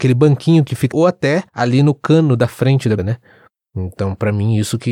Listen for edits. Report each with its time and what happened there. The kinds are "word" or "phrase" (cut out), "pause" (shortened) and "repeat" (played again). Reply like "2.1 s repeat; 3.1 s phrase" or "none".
0.9 s phrase; 1.5 s pause; 3.0 s word